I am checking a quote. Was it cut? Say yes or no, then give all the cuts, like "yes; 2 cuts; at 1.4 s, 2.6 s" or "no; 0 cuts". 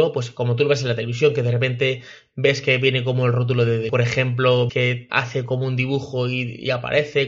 yes; 3 cuts; at 3.9 s, 4.7 s, 5.1 s